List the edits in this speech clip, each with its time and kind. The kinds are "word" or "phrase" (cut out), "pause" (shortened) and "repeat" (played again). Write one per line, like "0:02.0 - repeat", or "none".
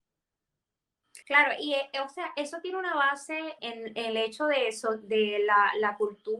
0:01.2 - pause
0:03.6 - word